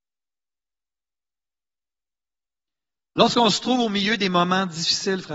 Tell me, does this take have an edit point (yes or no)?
no